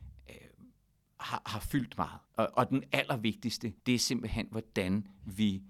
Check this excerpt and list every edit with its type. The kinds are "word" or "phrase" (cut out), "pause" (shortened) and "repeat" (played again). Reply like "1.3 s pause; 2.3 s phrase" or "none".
2.2 s pause; 3.8 s pause